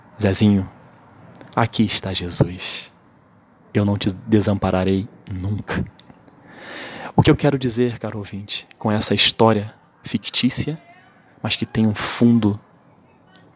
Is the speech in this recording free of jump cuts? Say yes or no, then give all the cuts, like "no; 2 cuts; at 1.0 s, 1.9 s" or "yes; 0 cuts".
yes; 0 cuts